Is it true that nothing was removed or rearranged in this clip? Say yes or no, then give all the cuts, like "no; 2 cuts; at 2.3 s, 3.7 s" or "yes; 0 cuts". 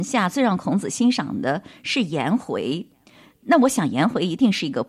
yes; 0 cuts